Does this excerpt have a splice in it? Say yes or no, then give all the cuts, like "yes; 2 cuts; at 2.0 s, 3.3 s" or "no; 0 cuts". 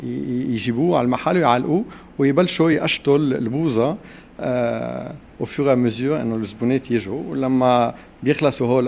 no; 0 cuts